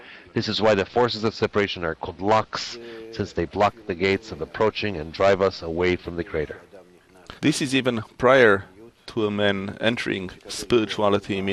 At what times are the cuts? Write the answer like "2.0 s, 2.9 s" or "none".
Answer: 7.4 s, 10.4 s